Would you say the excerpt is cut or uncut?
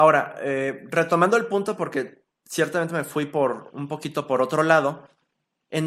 uncut